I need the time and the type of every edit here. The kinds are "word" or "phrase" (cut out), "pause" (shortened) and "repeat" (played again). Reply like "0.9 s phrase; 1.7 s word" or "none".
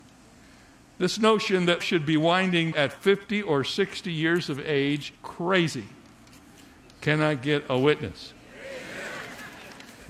1.8 s word; 2.7 s word; 5.2 s word

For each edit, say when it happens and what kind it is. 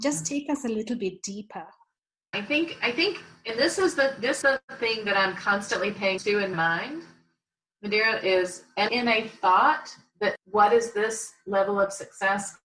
2.3 s word; 4.4 s word; 6.2 s word; 6.5 s word; 8.9 s word; 10.4 s word

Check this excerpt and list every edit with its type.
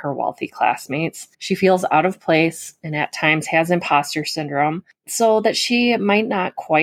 1.3 s pause

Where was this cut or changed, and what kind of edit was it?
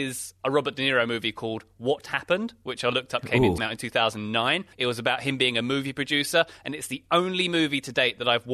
2.0 s word; 3.6 s phrase; 4.7 s pause

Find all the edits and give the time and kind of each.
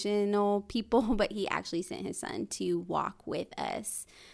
none

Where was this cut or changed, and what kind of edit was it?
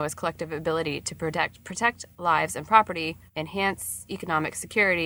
3.3 s pause

